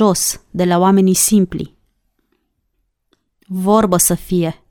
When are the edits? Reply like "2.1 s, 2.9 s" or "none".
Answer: none